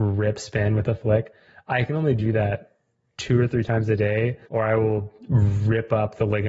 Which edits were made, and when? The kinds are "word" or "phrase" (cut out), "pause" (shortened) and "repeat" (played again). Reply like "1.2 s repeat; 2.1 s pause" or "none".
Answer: 4.4 s pause